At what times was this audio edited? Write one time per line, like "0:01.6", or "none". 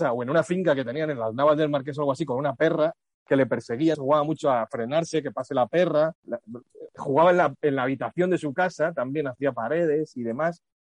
0:03.9
0:06.1